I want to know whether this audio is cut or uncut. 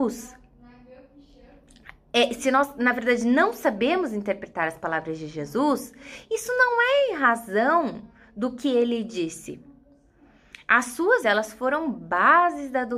cut